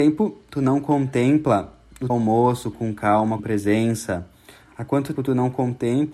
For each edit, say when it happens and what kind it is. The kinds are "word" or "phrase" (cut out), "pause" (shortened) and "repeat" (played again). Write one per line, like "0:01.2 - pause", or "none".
0:02.1 - word
0:02.7 - word
0:03.4 - word
0:05.1 - word